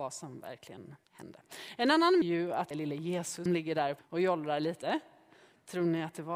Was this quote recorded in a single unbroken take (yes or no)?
no